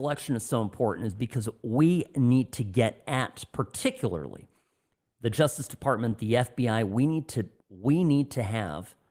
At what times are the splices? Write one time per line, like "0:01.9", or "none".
none